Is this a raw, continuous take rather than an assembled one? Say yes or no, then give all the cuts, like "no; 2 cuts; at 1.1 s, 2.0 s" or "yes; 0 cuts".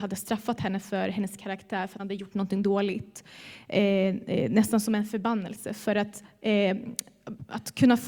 no; 1 cut; at 2.0 s